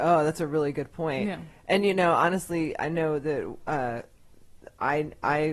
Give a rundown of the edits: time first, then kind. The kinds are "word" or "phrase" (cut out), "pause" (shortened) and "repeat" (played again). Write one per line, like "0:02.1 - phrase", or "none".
none

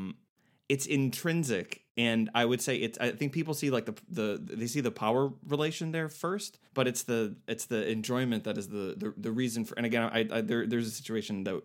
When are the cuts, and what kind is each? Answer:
0:06.6 - pause

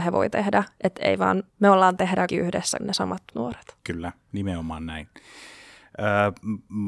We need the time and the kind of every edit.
0:01.5 - pause
0:02.0 - phrase
0:02.3 - word
0:02.8 - phrase
0:03.3 - word
0:03.8 - pause

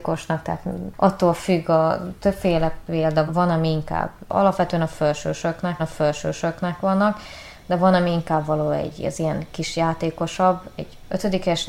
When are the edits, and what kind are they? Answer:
0:03.3 - word
0:05.8 - repeat

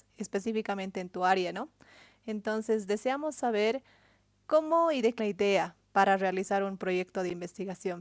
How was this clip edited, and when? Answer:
0:05.2 - phrase

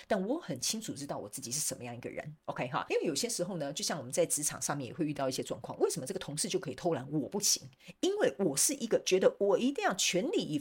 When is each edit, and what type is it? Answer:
0:02.4 - pause
0:02.9 - word

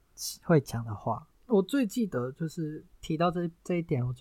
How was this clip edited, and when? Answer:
0:02.9 - pause

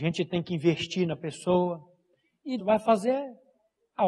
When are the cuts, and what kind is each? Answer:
0:02.6 - word

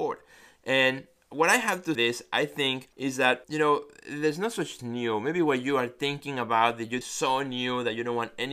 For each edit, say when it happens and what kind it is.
0:01.9 - phrase
0:02.9 - pause
0:03.4 - word
0:04.8 - phrase
0:07.0 - phrase

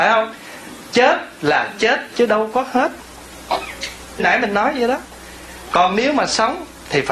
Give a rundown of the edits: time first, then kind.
0:04.2 - word

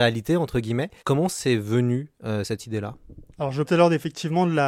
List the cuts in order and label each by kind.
0:01.0 - pause
0:02.4 - word
0:03.3 - pause
0:03.6 - word

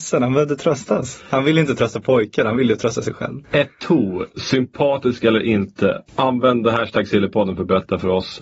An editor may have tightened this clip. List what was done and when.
0:03.4 - pause
0:06.1 - pause

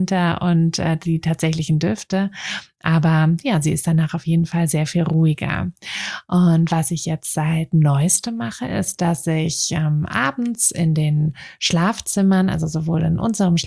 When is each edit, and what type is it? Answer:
none

